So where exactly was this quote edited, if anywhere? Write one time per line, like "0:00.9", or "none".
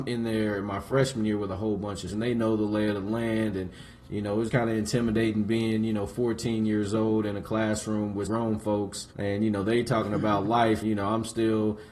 0:02.1
0:04.5
0:08.3
0:09.1
0:10.8